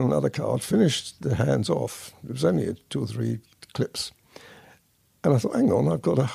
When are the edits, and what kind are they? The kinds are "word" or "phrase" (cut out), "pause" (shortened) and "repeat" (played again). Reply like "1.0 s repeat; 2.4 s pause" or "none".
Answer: none